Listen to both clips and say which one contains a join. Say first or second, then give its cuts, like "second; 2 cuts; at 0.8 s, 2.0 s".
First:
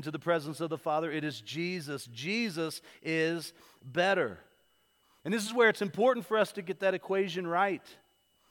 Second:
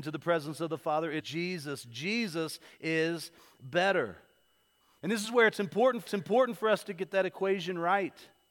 second; 2 cuts; at 1.2 s, 6.1 s